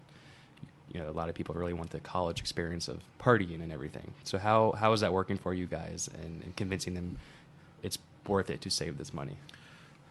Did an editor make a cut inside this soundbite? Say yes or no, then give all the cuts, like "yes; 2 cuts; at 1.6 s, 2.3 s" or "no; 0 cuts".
no; 0 cuts